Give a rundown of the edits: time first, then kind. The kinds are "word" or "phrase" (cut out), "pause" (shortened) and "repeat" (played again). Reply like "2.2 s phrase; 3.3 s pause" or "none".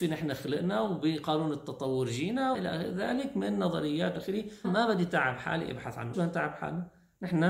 2.5 s word; 4.1 s word; 4.6 s word; 6.1 s word